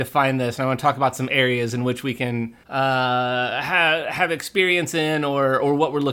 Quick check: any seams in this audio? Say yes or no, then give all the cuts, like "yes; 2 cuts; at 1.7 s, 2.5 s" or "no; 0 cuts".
yes; 1 cut; at 2.6 s